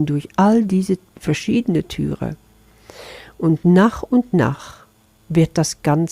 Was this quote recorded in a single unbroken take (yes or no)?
yes